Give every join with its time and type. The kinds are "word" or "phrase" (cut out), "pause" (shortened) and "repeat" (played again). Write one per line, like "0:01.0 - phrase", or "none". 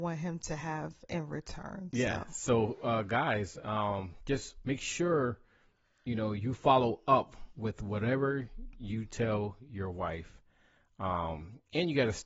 none